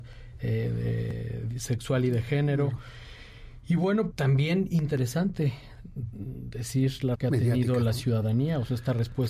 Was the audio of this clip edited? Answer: yes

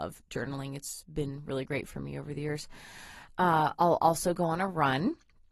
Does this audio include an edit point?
no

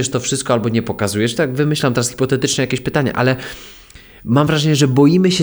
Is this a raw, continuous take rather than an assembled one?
yes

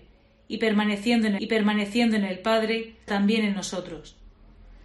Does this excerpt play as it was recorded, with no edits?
no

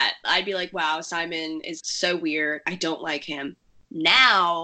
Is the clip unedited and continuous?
no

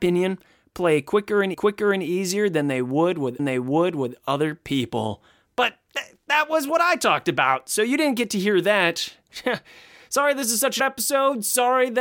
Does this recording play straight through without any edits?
no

